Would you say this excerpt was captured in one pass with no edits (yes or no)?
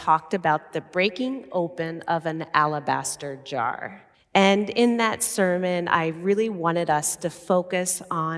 no